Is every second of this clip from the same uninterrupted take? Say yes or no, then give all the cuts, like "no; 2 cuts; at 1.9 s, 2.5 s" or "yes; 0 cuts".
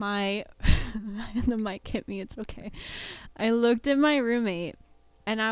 yes; 0 cuts